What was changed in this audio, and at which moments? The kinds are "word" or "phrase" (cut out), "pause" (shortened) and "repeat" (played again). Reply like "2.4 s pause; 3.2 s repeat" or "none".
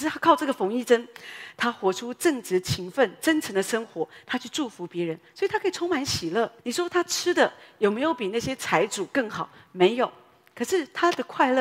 6.6 s pause